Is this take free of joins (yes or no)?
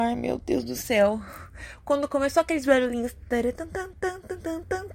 yes